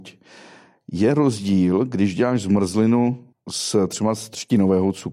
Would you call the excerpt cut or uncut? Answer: cut